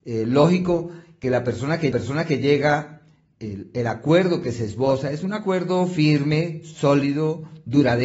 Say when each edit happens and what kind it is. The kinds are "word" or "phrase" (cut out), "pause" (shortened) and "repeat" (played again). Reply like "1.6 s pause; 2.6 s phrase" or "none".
1.9 s repeat